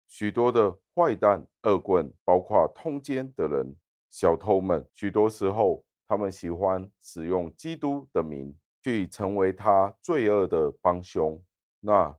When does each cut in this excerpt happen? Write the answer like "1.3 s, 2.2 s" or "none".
2.2 s, 3.8 s, 4.9 s